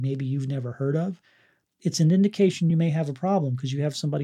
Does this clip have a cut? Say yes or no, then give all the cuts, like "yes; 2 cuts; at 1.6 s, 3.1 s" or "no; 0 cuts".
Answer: no; 0 cuts